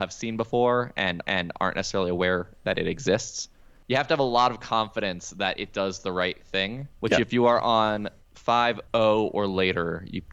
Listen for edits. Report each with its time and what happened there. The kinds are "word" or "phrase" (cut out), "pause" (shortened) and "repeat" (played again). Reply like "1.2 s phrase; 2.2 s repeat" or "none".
1.2 s repeat; 6.9 s pause; 8.9 s pause